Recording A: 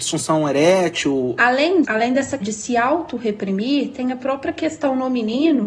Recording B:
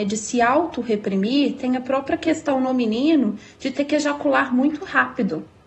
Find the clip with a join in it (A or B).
A